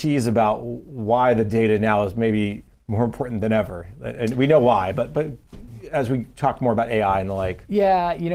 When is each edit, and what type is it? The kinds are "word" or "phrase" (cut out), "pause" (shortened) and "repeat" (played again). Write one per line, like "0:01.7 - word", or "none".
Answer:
none